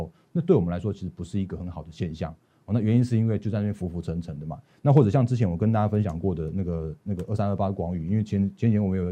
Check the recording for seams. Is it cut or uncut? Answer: uncut